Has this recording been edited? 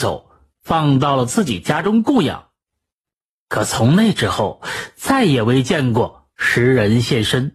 no; 0 cuts

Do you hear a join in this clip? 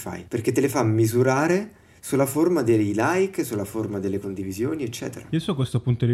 no; 0 cuts

